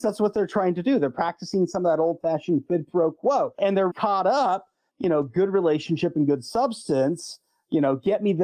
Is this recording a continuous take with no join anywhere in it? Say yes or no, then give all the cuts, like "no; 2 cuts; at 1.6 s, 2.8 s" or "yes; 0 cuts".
no; 2 cuts; at 3.9 s, 4.9 s